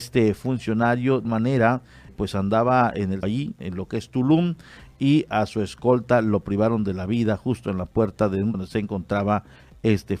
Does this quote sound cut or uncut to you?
cut